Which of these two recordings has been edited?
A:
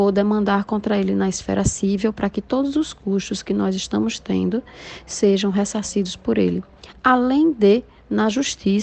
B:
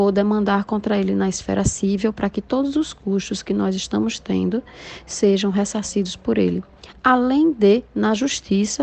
B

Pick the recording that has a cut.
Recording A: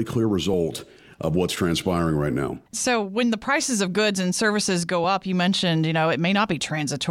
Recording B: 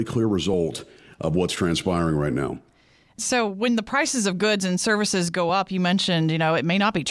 A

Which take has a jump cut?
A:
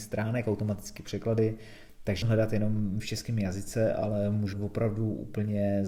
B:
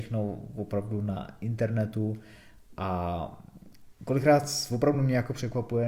A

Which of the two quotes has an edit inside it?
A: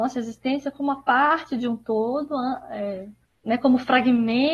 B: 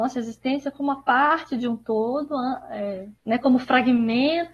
B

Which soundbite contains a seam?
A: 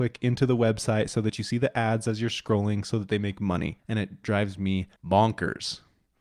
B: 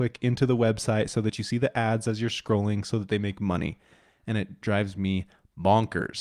A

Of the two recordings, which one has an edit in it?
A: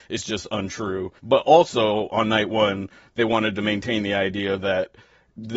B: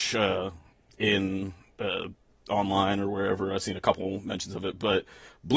A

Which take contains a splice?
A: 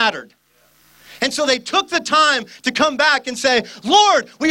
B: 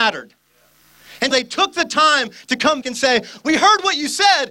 B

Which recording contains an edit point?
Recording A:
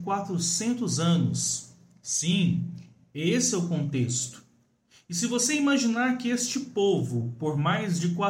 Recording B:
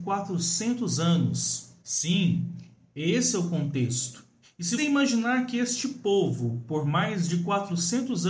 B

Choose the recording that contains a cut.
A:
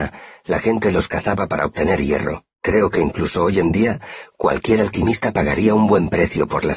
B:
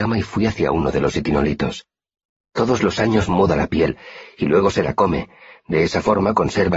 A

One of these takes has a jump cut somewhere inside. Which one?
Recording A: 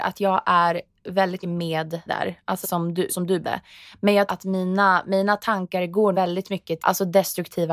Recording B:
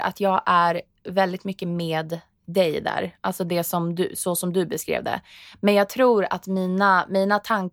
A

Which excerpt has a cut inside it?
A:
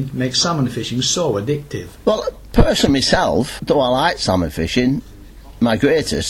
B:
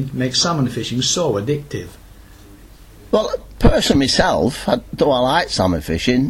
A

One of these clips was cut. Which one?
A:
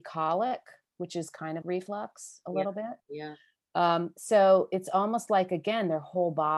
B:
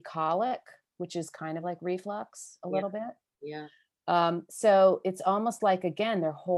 A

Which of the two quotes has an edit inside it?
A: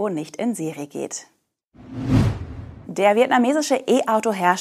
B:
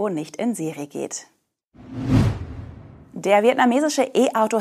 A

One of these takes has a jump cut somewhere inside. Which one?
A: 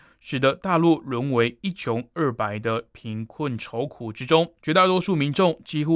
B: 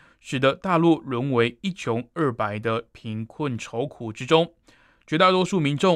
A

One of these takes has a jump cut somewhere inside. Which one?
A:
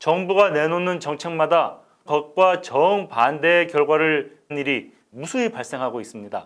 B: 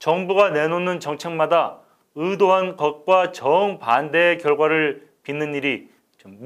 A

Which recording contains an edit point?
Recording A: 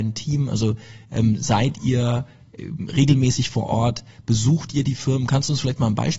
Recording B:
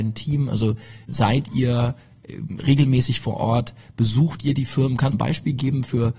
B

